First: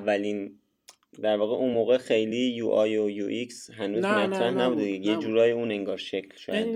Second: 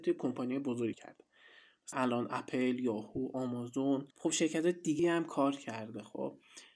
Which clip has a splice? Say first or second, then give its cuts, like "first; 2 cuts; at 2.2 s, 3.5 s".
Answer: second; 4 cuts; at 0.9 s, 1.9 s, 4.1 s, 5.0 s